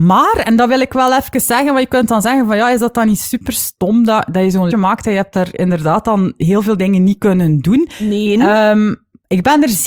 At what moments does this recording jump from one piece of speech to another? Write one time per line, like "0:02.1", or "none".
0:04.7